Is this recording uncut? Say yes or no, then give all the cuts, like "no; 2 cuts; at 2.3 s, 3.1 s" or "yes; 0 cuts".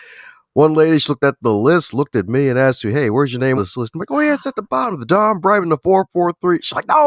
no; 1 cut; at 3.6 s